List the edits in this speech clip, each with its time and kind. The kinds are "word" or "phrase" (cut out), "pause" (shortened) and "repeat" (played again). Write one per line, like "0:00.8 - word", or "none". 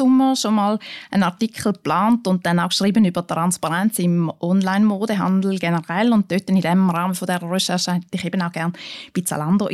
none